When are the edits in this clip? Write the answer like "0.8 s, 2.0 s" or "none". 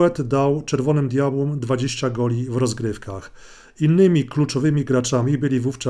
none